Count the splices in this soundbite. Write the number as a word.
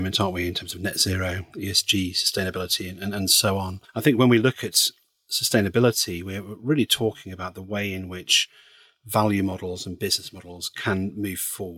zero